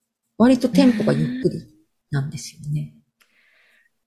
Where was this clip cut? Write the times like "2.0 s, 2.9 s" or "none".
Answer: none